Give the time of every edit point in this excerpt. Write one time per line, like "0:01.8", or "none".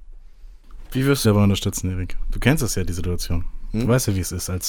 0:01.2